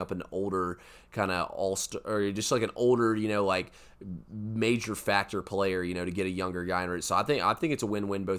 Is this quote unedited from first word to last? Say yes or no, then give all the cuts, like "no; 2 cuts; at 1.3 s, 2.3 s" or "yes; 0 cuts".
yes; 0 cuts